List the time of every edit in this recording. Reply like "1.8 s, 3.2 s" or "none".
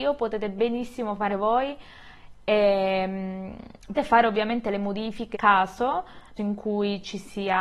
1.3 s, 3.9 s, 5.3 s, 6.4 s

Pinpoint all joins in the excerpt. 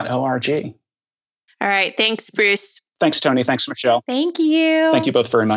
2.9 s

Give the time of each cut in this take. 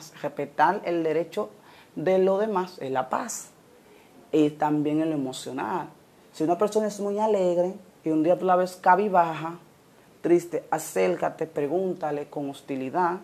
none

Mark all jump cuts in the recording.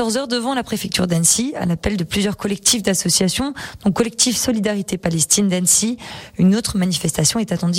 none

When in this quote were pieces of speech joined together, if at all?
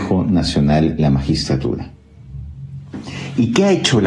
1.0 s

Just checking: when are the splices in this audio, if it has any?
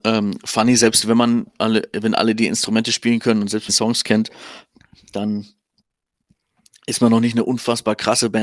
3.7 s

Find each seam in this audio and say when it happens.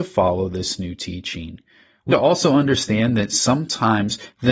2.1 s

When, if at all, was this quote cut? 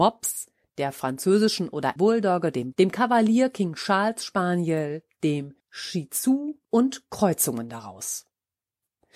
2.0 s, 2.7 s, 5.6 s, 6.6 s

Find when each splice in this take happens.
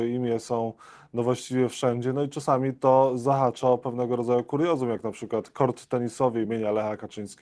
none

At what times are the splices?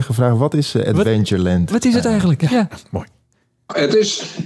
none

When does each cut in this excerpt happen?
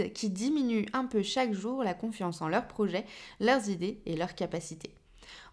none

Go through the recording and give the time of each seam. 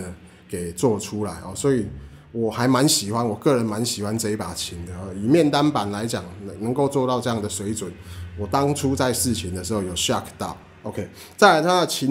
none

